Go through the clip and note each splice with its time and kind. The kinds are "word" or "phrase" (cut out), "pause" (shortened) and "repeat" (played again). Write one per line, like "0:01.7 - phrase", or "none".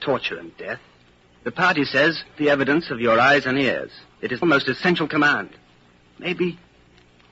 0:02.4 - word
0:04.4 - word